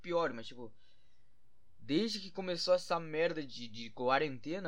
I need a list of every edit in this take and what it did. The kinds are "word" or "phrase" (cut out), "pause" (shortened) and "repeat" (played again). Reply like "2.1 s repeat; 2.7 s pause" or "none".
none